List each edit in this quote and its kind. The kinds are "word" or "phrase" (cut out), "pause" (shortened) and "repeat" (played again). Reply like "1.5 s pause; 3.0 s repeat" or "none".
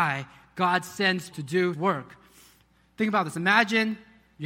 1.3 s word; 1.7 s word